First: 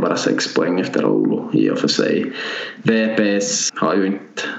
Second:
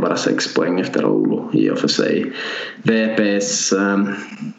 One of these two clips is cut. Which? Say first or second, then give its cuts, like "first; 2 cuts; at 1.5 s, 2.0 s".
first; 1 cut; at 3.7 s